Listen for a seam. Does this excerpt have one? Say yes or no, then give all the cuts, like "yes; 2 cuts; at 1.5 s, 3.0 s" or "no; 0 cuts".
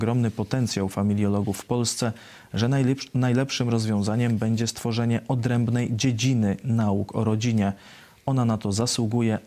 no; 0 cuts